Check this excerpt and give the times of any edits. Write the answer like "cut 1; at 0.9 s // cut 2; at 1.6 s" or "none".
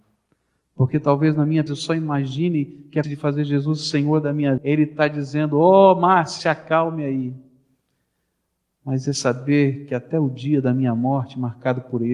cut 1; at 1.7 s // cut 2; at 3.0 s // cut 3; at 4.6 s